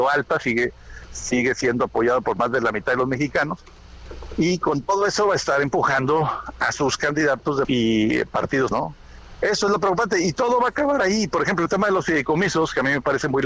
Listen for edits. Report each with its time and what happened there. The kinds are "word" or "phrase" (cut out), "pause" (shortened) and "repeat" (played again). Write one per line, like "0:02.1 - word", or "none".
0:07.6 - word
0:08.7 - word

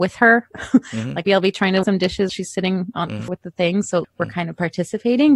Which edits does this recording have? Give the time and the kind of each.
0:01.3 - word
0:01.8 - word
0:02.3 - word
0:03.3 - word
0:04.0 - word

